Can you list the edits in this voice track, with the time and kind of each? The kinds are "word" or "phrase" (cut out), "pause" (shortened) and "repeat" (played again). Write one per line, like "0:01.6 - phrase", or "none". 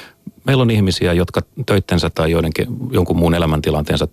0:02.1 - word